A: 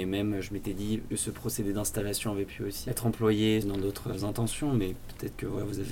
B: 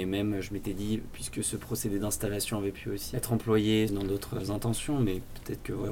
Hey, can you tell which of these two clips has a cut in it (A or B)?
A